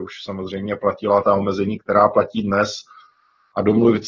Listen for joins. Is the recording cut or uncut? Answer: cut